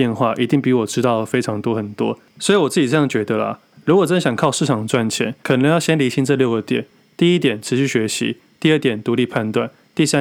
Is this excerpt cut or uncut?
uncut